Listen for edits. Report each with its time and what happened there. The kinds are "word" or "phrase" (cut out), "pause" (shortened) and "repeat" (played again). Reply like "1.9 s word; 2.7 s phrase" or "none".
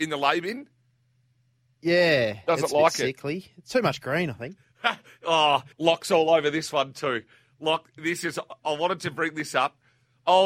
5.7 s pause